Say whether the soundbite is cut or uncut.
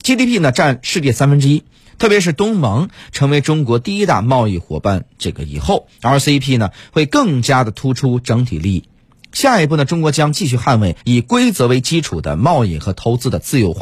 cut